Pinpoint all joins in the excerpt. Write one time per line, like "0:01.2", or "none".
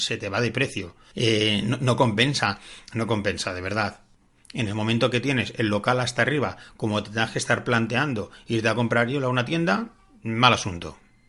none